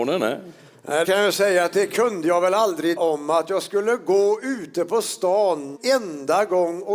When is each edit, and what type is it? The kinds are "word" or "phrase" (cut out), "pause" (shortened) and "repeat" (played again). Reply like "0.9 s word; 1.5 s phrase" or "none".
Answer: 1.0 s word; 3.0 s word; 5.8 s word